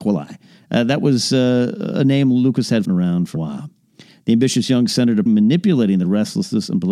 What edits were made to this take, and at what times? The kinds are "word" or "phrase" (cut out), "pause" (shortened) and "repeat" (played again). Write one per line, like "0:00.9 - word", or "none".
0:02.8 - word
0:03.4 - word
0:05.3 - word